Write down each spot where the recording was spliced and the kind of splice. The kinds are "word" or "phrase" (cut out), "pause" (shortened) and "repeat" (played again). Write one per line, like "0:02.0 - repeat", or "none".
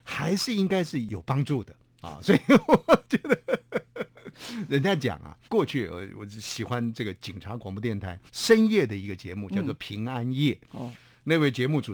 0:05.5 - pause
0:08.3 - pause

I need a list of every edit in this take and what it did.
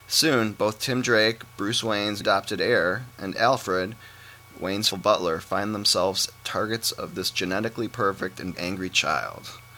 0:02.2 - word
0:04.9 - word
0:08.5 - word

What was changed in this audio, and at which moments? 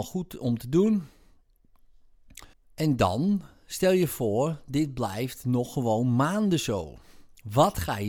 0:02.5 - pause

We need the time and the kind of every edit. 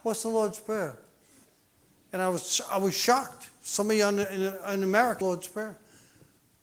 0:01.4 - pause
0:05.2 - phrase

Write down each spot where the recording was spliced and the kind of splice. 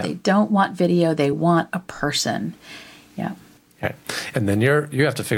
none

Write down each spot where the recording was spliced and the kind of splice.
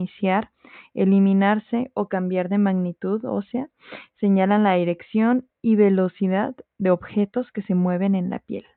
none

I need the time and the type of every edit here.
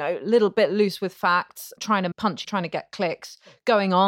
0:01.8 - word
0:02.1 - word
0:02.4 - word

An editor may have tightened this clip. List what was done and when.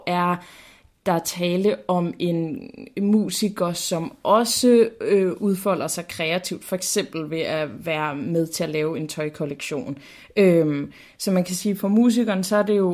none

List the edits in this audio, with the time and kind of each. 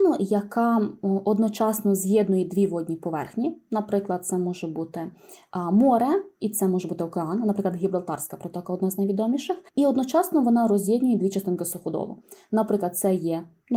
0:09.7 - pause

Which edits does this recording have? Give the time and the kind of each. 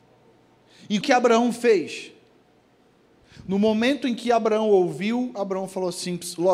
0:01.0 - word

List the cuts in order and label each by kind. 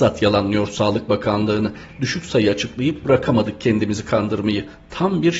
none

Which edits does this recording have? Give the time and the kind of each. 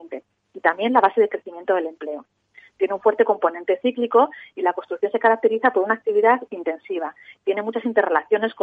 none

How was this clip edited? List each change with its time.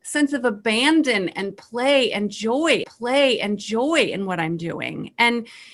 0:02.8 - repeat

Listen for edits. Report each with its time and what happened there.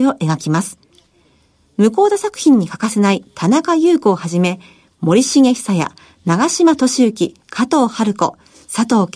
none

